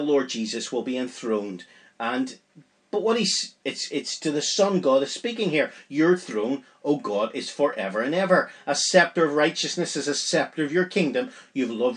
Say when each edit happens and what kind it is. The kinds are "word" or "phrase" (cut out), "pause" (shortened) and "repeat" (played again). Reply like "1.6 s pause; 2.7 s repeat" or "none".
none

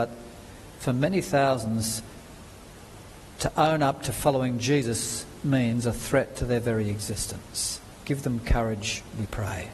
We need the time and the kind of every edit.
none

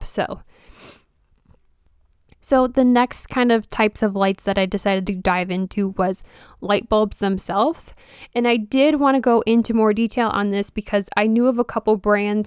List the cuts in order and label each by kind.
none

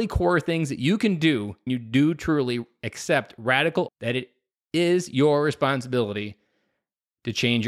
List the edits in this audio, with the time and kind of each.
1.7 s word; 3.9 s word

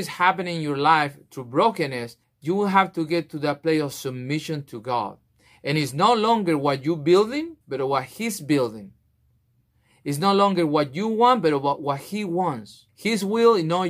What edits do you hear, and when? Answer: 2.2 s pause; 7.6 s pause; 12.9 s pause

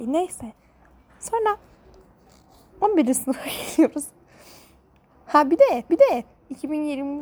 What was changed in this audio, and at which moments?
5.9 s repeat

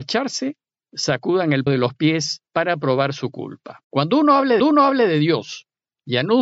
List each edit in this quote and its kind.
1.7 s word; 2.5 s pause; 3.8 s pause; 4.6 s repeat

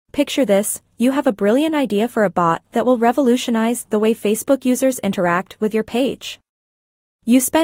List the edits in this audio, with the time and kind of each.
none

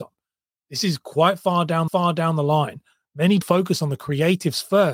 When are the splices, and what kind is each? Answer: 1.9 s repeat; 3.4 s word

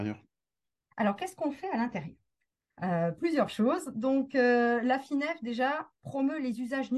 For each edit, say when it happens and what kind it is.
none

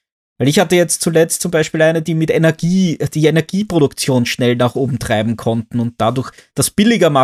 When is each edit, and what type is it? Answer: none

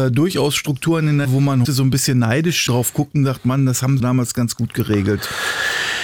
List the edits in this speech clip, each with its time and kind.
1.2 s word; 1.6 s word; 2.7 s word; 4.0 s word

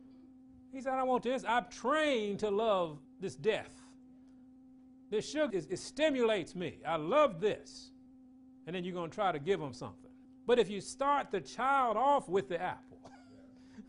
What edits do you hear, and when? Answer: 3.0 s word; 5.5 s word; 8.1 s pause; 10.2 s pause

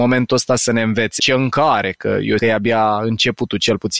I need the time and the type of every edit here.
1.2 s word; 2.4 s word

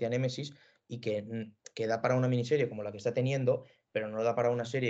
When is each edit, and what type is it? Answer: none

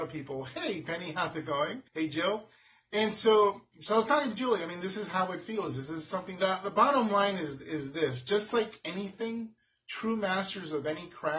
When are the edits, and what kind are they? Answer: 1.9 s pause; 6.4 s phrase

